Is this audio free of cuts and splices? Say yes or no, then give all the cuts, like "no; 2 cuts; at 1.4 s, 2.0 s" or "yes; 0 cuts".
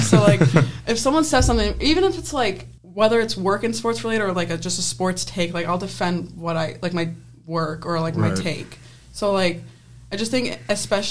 no; 1 cut; at 2.8 s